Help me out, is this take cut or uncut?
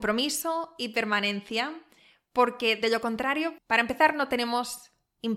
cut